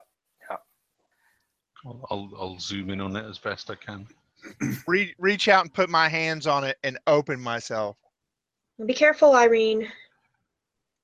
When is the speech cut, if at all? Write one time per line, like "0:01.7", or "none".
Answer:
none

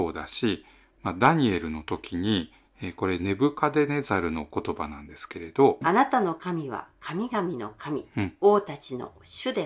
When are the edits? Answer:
none

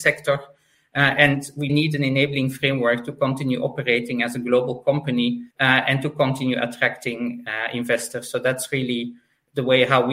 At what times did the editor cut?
0:01.7
0:05.5

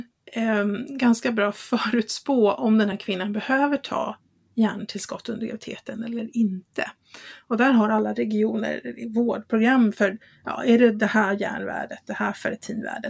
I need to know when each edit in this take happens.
none

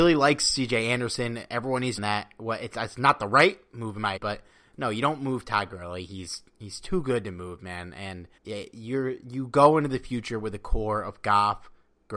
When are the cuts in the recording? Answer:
0:02.0
0:04.2
0:08.4

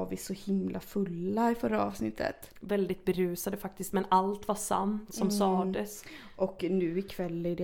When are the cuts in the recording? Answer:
none

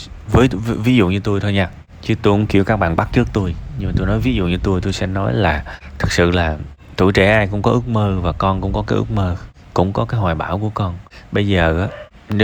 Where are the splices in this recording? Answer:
none

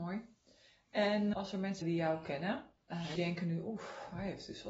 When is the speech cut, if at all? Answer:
0:01.3
0:01.8
0:02.8
0:03.2

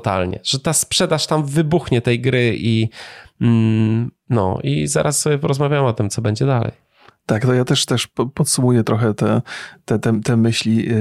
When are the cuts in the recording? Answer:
none

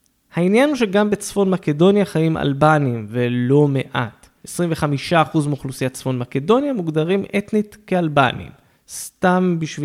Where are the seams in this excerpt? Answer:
0:04.4
0:08.8

